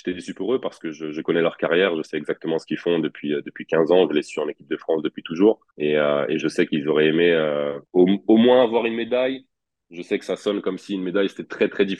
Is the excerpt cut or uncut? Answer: cut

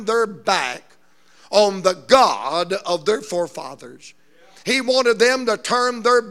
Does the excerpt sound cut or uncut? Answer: uncut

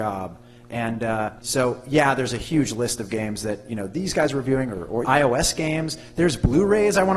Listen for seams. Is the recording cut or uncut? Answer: cut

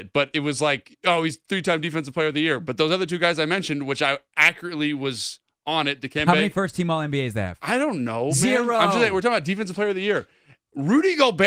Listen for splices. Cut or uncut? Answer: uncut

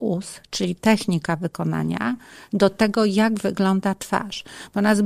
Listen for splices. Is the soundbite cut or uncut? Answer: uncut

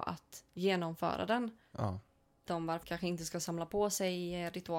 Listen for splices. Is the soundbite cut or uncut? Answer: cut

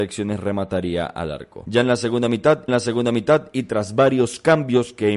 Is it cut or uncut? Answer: cut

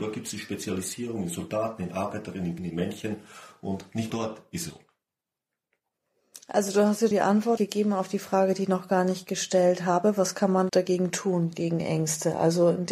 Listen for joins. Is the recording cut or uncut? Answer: cut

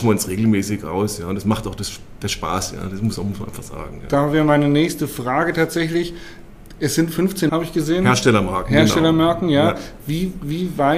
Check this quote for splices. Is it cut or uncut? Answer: cut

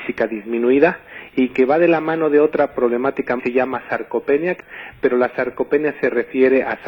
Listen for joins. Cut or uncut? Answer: cut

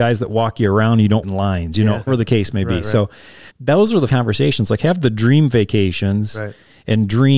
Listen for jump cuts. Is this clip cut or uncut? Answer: cut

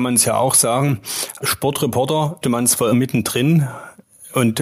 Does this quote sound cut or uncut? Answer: cut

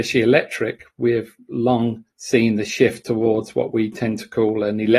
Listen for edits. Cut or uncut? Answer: cut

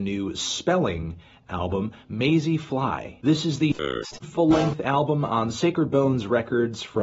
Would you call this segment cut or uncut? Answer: uncut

